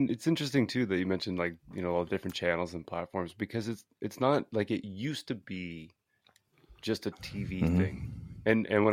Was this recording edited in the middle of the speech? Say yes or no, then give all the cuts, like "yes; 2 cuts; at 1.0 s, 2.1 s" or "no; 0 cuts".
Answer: no; 0 cuts